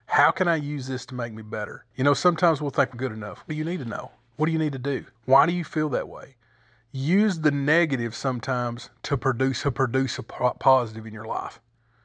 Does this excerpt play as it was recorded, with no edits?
no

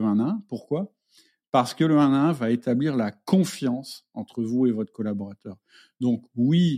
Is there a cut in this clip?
no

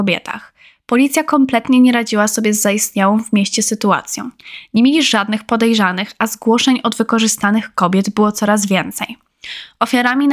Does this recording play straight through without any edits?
yes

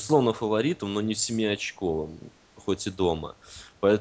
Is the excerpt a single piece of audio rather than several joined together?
yes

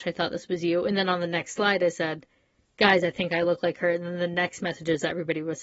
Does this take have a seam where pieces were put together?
no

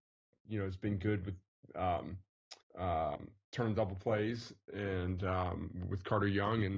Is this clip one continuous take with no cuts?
no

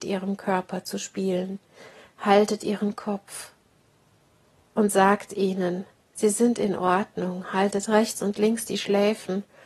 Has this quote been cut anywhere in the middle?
no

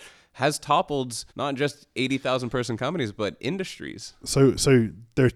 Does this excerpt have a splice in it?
yes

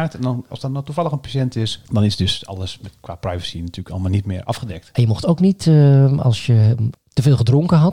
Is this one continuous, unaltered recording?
yes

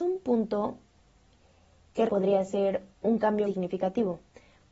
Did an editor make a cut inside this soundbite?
yes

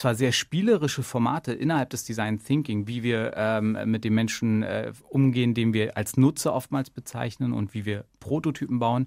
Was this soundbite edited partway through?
yes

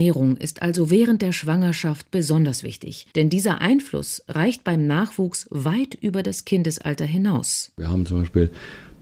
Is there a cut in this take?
yes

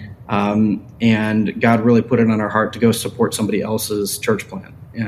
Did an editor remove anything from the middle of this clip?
no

